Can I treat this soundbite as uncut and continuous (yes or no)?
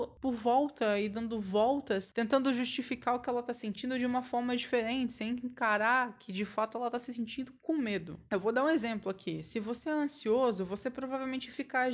yes